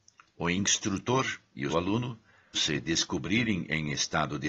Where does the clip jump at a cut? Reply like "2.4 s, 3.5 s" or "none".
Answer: 1.7 s, 2.5 s